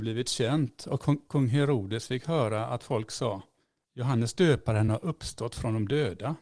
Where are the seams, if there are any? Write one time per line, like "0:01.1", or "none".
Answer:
none